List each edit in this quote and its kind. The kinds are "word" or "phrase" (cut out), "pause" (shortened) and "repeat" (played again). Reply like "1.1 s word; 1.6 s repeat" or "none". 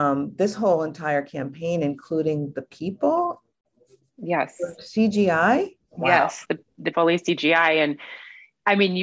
5.8 s pause; 6.9 s phrase

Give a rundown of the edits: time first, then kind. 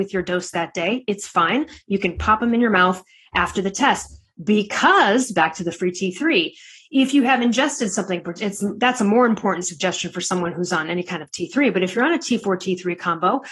none

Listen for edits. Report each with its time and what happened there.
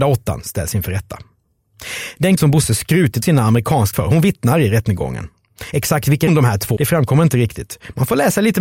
2.4 s word; 3.2 s word; 3.9 s word; 6.3 s word; 6.8 s word

